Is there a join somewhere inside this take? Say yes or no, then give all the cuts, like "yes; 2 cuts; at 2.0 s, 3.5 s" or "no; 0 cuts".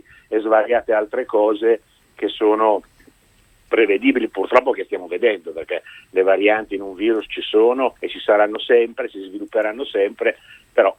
yes; 1 cut; at 8.0 s